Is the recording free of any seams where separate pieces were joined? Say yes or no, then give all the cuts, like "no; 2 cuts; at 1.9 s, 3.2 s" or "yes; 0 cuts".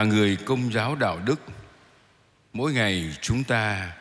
yes; 0 cuts